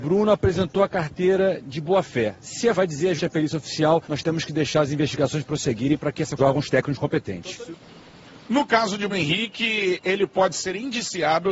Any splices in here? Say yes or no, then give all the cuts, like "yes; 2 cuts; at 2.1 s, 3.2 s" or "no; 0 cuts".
yes; 6 cuts; at 2.7 s, 3.2 s, 4.0 s, 6.4 s, 8.4 s, 9.1 s